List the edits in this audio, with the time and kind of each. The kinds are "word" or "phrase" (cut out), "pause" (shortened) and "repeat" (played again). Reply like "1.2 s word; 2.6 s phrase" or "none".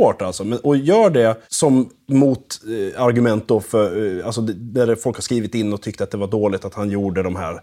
1.4 s pause